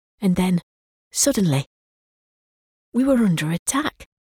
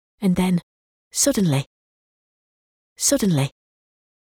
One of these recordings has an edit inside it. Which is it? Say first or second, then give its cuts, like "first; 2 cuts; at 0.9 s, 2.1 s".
second; 1 cut; at 2.8 s